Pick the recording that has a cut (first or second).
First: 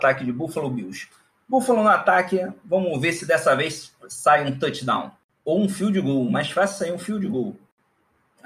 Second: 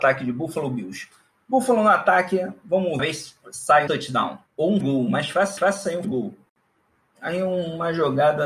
second